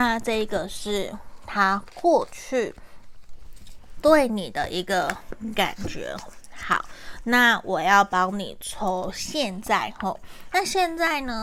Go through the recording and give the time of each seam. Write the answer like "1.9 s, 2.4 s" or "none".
6.3 s